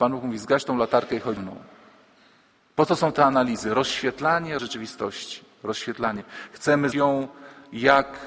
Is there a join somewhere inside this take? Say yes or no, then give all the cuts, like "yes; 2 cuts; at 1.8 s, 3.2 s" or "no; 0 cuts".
yes; 3 cuts; at 1.4 s, 4.6 s, 6.9 s